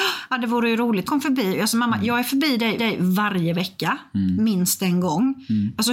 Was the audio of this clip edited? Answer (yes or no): yes